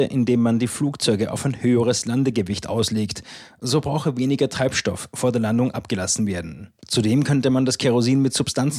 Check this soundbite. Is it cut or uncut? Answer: cut